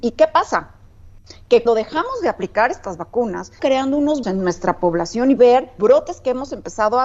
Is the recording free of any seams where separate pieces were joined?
no; 5 cuts; at 1.7 s, 3.6 s, 4.2 s, 5.4 s, 5.8 s

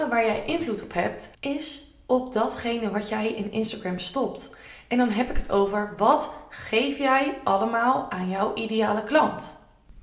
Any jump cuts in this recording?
yes; 1 cut; at 1.3 s

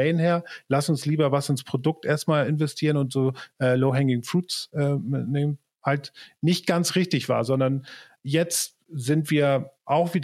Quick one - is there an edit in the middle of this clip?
no; 0 cuts

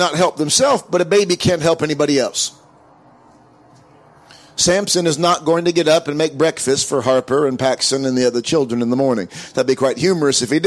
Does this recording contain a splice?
no; 0 cuts

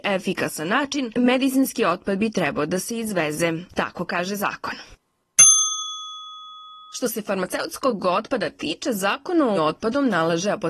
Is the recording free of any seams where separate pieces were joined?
no; 1 cut; at 9.6 s

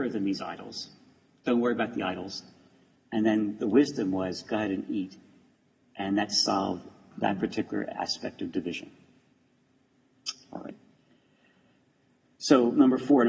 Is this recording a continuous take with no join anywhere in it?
yes; 0 cuts

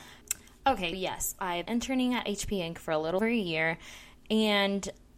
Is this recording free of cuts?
no; 3 cuts; at 0.9 s, 1.7 s, 3.2 s

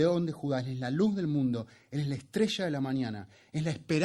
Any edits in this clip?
no; 0 cuts

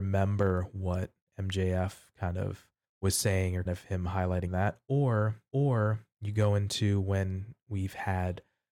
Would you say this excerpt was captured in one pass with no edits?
no; 4 cuts; at 2.8 s, 3.7 s, 4.5 s, 5.5 s

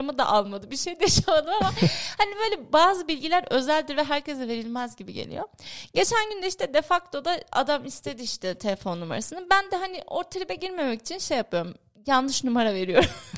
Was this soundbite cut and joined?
no; 0 cuts

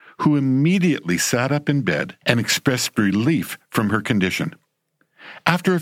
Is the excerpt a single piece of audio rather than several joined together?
no; 1 cut; at 2.2 s

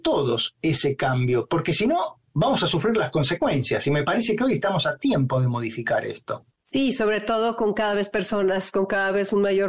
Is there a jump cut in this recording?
yes; 1 cut; at 6.5 s

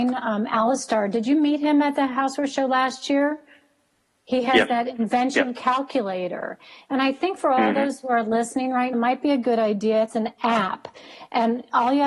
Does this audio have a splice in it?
yes; 1 cut; at 8.9 s

